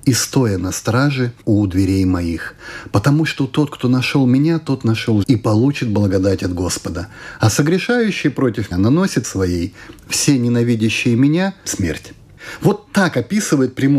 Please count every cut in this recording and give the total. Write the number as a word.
five